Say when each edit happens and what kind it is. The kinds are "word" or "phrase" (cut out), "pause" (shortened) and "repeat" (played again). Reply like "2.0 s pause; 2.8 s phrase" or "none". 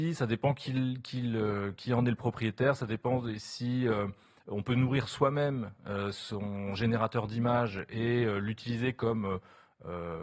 none